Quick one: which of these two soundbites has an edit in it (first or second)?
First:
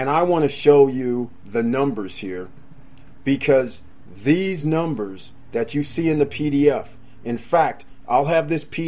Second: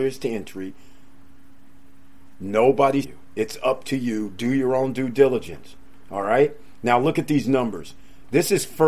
second